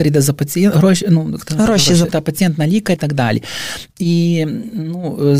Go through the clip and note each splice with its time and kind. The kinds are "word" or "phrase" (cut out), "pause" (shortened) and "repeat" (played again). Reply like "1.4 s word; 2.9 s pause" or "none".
2.1 s word; 3.0 s word